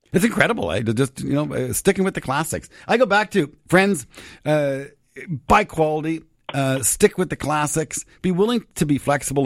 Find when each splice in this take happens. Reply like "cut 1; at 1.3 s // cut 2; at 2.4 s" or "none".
none